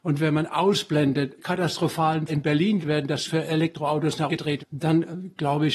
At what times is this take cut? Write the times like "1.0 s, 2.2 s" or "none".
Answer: 1.4 s, 2.3 s, 2.8 s, 3.3 s, 4.3 s, 4.6 s